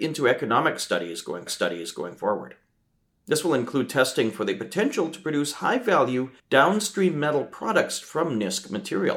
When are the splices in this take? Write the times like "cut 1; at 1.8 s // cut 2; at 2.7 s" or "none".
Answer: cut 1; at 1.5 s // cut 2; at 6.4 s